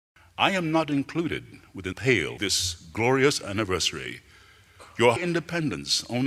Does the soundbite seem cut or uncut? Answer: cut